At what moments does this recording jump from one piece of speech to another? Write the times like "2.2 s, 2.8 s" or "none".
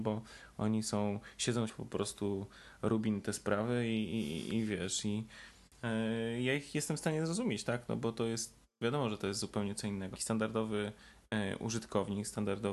1.7 s, 10.2 s